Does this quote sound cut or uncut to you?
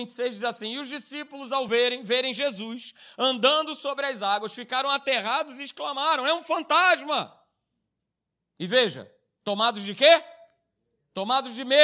uncut